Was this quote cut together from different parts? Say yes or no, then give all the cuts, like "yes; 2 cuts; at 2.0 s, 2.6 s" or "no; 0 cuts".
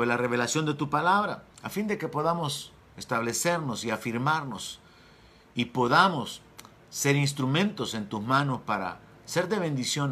yes; 1 cut; at 1.5 s